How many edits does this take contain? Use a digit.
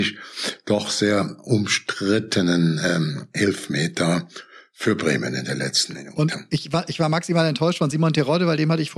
0